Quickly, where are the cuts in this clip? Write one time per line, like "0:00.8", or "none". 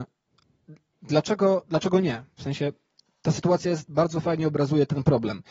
0:00.9